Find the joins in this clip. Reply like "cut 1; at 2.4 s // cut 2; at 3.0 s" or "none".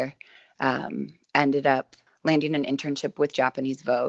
cut 1; at 1.2 s // cut 2; at 2.1 s